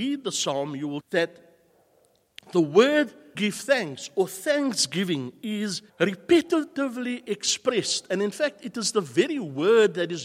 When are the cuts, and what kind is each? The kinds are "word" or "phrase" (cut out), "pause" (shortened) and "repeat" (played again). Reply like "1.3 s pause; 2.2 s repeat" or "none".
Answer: 1.0 s word; 3.4 s word; 5.9 s pause